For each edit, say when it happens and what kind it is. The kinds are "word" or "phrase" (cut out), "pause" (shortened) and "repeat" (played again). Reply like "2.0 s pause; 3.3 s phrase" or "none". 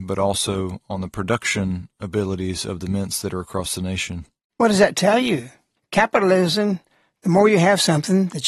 4.4 s pause

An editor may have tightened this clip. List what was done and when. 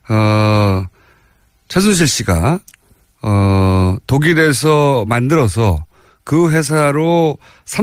none

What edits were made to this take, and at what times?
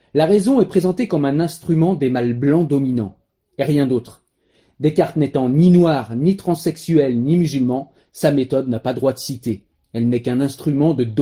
none

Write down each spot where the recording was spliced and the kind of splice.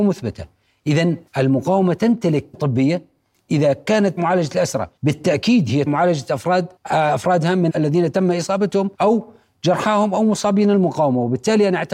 1.3 s pause; 2.5 s word; 3.3 s phrase; 4.2 s word; 5.0 s pause; 5.9 s word; 6.8 s pause; 7.7 s word; 8.9 s pause

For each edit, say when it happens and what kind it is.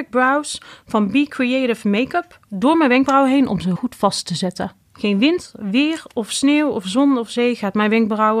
2.5 s pause; 3.8 s word; 4.8 s pause

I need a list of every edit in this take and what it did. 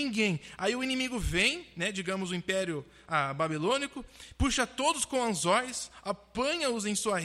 none

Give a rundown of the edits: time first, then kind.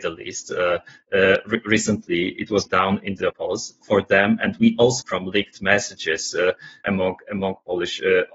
2.7 s word; 3.3 s word; 3.8 s word; 5.0 s phrase; 6.8 s word

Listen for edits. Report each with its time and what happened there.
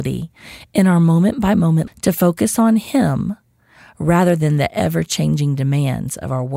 1.9 s word

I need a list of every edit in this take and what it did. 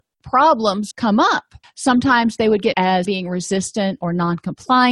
0.9 s word; 1.6 s pause; 2.7 s word; 3.1 s word

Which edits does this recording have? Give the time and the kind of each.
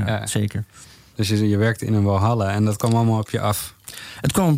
none

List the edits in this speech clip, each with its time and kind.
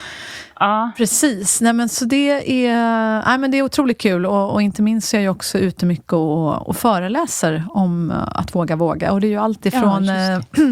none

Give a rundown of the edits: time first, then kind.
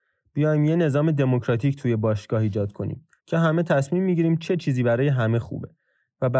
3.2 s pause

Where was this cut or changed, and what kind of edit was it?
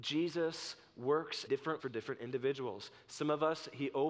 1.5 s word; 1.8 s word

